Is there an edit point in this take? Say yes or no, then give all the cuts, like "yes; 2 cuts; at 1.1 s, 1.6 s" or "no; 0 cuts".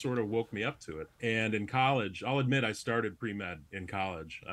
yes; 1 cut; at 1.1 s